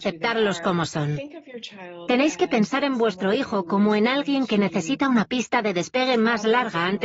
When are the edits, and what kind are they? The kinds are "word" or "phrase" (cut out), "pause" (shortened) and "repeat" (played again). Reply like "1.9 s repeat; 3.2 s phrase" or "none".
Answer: none